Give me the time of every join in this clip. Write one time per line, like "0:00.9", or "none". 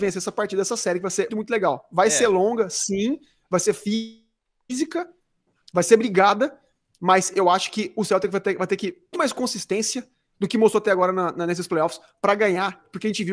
0:01.3
0:09.1